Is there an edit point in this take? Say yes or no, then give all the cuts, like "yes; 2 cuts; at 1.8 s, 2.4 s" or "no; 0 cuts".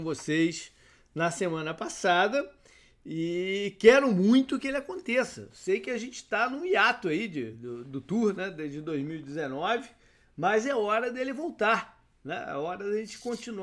no; 0 cuts